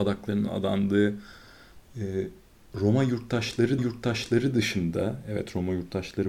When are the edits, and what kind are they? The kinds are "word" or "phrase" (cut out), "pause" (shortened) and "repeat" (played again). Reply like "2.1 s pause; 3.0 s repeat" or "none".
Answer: 3.8 s repeat

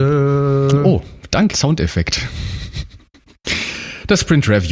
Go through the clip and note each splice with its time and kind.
1.5 s word

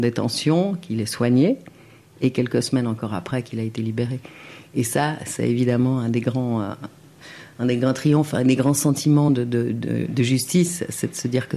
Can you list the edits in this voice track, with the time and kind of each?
none

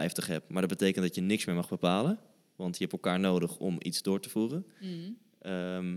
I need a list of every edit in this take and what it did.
none

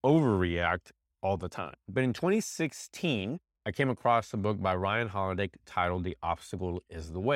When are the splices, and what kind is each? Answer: none

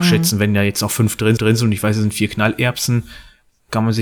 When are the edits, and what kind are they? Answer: 1.4 s repeat

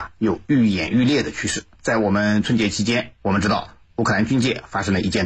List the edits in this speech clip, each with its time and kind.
1.7 s pause

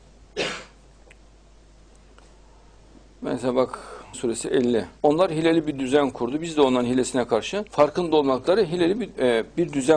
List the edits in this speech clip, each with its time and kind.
4.1 s word; 5.0 s pause; 7.7 s pause

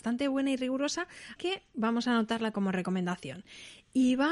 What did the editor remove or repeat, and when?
1.4 s word; 2.5 s word

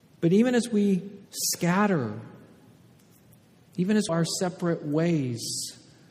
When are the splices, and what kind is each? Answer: 1.2 s pause; 4.1 s phrase

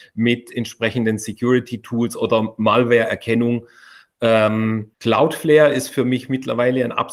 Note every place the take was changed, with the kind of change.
4.9 s pause

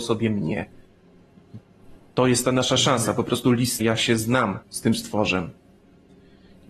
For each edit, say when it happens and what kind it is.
3.8 s phrase; 4.6 s pause

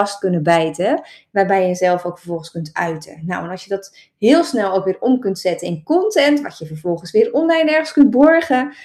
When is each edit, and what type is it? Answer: none

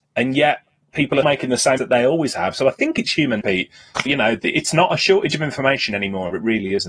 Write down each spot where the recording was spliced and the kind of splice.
1.2 s word; 1.8 s word; 3.4 s word; 4.1 s word

